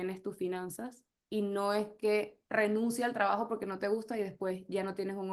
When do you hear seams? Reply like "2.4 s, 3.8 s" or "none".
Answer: none